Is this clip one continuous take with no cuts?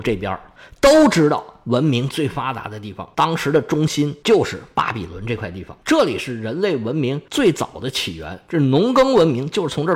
no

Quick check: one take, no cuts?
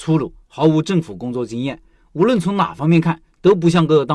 yes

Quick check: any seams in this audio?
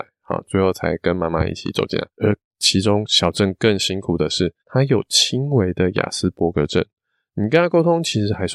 yes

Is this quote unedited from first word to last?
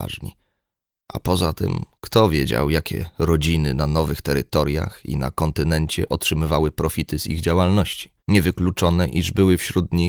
no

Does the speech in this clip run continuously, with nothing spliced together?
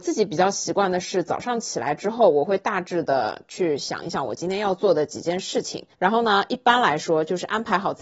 no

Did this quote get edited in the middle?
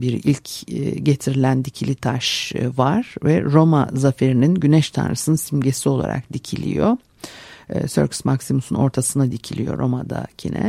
no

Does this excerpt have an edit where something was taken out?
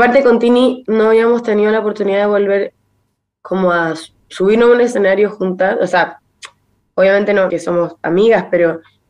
yes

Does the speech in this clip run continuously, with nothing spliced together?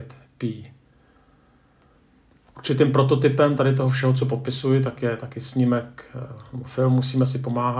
yes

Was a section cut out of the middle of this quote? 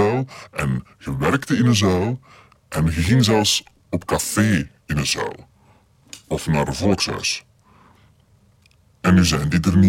no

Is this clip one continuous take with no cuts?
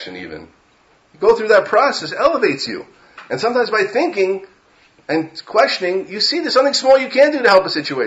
yes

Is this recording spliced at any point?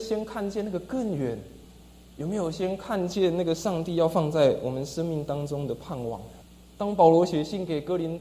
no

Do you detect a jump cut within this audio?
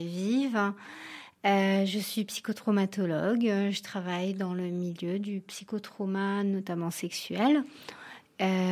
no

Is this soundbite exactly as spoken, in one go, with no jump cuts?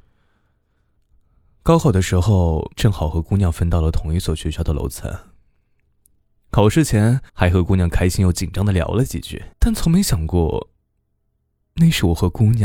no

